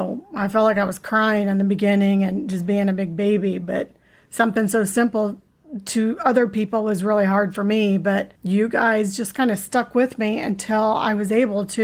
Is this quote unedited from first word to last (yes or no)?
no